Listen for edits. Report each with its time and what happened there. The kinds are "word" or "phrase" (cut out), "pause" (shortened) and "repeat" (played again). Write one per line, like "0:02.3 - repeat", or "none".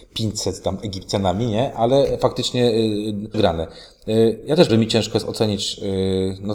0:03.3 - word
0:04.7 - word